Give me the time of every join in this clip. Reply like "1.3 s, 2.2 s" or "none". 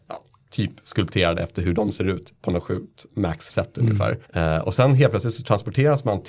3.5 s, 4.2 s

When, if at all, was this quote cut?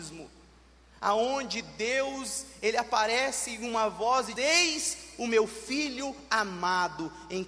4.4 s

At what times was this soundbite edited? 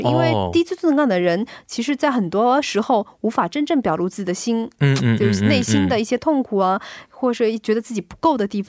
none

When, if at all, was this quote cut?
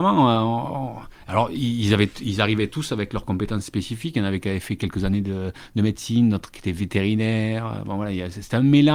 none

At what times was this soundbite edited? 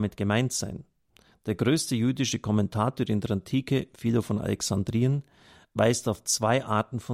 none

